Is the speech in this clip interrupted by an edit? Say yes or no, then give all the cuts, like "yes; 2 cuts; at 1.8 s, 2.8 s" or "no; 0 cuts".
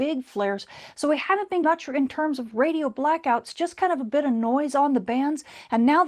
yes; 1 cut; at 1.6 s